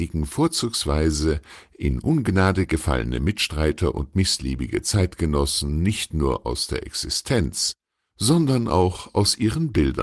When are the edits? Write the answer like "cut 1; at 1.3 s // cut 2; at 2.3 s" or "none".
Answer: none